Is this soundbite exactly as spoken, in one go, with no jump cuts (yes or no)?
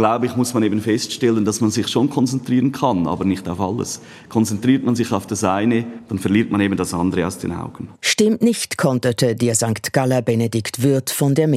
no